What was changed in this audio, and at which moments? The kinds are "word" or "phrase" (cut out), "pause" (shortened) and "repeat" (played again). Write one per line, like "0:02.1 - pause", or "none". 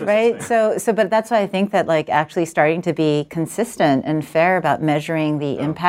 none